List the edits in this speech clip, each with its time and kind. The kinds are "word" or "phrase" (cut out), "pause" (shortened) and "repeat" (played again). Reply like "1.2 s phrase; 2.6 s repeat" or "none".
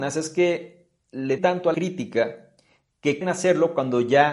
1.4 s word; 1.7 s word; 3.2 s word